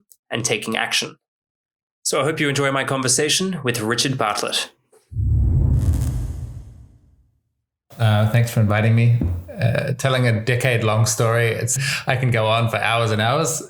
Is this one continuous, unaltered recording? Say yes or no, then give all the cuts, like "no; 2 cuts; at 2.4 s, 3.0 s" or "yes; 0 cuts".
no; 1 cut; at 11.8 s